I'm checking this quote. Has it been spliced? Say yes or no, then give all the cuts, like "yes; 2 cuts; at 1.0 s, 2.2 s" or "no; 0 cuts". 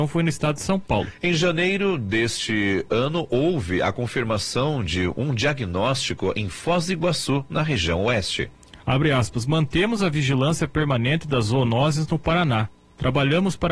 no; 0 cuts